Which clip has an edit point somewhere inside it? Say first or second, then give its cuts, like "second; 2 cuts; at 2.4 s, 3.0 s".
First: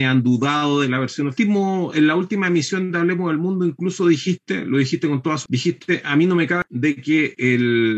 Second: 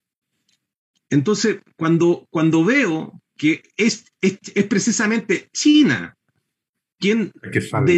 first; 1 cut; at 5.5 s